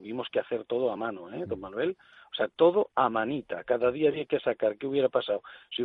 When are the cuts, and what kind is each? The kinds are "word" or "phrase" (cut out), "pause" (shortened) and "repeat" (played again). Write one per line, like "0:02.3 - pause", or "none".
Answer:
none